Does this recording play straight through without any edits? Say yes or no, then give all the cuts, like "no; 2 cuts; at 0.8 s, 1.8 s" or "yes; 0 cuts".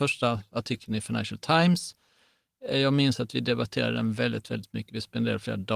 yes; 0 cuts